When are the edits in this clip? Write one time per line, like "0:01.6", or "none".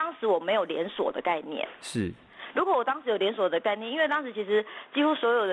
none